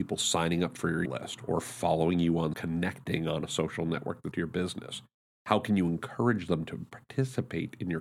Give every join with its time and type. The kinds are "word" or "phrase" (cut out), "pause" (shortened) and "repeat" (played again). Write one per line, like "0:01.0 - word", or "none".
0:01.1 - word
0:02.5 - word
0:04.3 - word